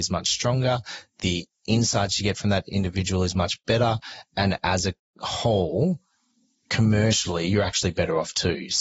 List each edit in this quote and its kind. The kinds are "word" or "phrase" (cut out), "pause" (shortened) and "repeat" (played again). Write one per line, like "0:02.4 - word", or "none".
none